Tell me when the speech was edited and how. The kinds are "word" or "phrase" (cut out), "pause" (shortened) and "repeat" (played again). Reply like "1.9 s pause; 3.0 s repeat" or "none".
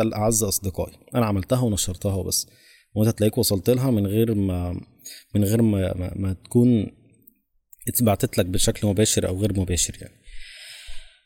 none